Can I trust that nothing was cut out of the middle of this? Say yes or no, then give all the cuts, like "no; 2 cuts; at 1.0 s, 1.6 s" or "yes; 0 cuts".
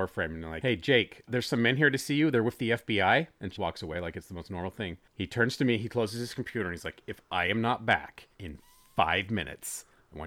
no; 2 cuts; at 3.6 s, 8.3 s